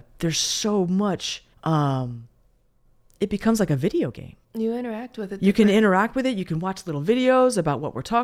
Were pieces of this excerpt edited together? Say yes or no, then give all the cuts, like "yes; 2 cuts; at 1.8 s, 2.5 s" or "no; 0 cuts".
yes; 2 cuts; at 1.5 s, 4.4 s